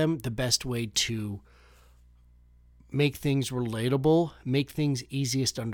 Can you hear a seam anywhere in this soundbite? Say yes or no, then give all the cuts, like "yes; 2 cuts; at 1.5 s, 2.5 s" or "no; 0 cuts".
no; 0 cuts